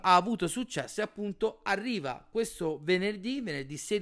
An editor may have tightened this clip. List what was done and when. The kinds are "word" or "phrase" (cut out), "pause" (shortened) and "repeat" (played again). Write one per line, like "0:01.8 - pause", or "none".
none